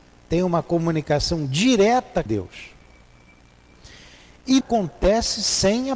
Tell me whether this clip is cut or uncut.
cut